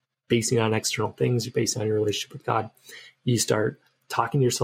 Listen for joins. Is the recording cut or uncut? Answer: uncut